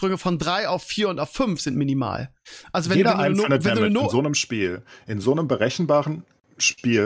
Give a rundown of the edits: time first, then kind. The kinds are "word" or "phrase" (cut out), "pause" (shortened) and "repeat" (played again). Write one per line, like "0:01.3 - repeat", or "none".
none